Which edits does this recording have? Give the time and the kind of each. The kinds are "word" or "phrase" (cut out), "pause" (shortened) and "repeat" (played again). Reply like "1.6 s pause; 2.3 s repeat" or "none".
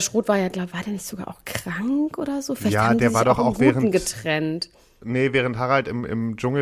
none